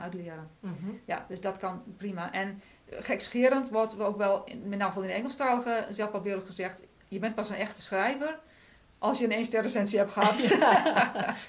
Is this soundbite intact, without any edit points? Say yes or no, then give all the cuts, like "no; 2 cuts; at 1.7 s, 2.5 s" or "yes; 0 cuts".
yes; 0 cuts